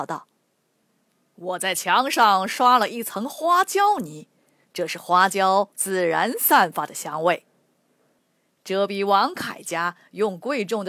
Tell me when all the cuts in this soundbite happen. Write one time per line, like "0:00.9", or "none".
none